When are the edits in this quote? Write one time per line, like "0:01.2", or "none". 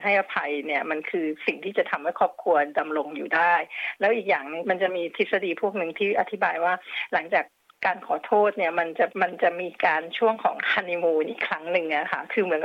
0:09.1